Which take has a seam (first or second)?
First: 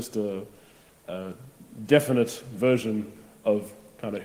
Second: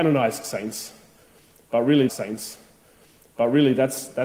second